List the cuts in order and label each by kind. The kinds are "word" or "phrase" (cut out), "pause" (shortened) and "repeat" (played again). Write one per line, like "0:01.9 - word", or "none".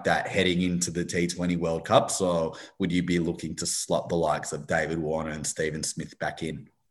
none